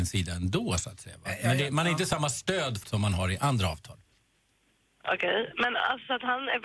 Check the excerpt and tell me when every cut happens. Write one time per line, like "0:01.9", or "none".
0:02.8